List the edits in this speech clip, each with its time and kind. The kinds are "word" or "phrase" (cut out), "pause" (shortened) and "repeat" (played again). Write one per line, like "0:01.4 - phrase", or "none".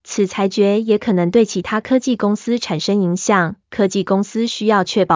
0:03.6 - pause